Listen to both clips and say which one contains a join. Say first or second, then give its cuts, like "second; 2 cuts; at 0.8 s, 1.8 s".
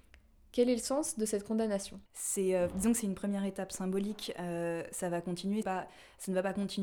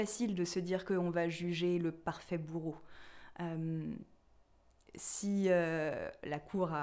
first; 2 cuts; at 2.1 s, 5.6 s